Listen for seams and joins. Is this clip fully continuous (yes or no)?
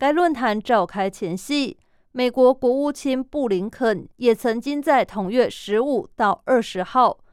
no